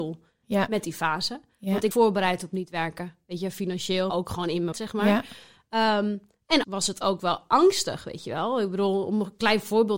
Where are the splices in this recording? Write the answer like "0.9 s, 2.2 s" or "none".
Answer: 1.9 s, 4.1 s, 4.7 s, 6.6 s